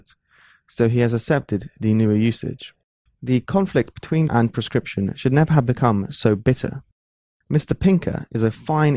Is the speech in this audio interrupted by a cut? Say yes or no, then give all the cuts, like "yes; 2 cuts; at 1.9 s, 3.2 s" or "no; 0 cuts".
yes; 2 cuts; at 3.0 s, 4.3 s